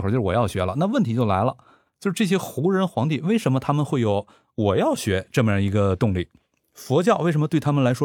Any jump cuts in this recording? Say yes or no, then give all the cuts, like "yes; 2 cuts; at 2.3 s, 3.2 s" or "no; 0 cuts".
no; 0 cuts